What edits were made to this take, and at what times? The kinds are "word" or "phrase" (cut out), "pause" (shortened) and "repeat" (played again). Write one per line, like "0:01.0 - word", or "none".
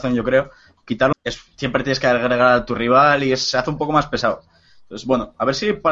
0:01.1 - phrase